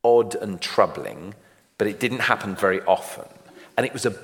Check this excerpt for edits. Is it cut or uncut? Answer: uncut